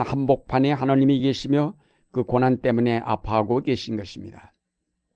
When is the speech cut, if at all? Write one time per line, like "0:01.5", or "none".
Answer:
none